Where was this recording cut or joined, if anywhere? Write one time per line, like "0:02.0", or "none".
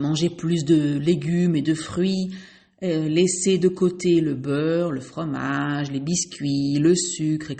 none